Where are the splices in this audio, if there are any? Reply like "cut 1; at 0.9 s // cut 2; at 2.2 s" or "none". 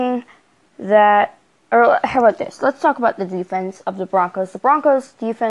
none

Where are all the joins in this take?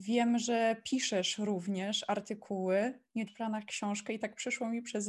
cut 1; at 3.3 s

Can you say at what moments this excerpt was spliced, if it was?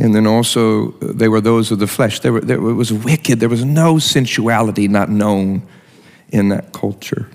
none

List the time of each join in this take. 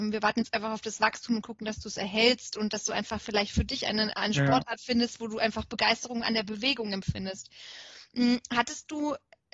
none

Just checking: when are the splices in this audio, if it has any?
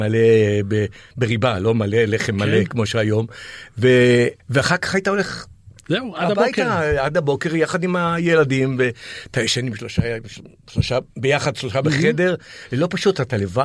cut 1; at 4.4 s // cut 2; at 11.1 s

